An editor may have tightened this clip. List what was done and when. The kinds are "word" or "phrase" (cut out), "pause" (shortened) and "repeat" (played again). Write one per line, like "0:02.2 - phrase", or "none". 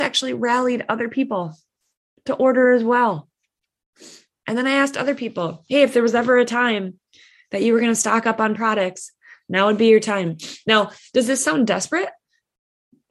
none